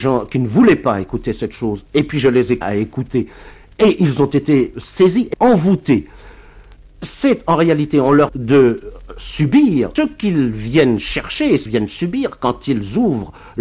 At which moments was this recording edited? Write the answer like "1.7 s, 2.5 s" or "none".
2.6 s, 4.7 s, 5.3 s, 8.3 s, 10.0 s, 11.7 s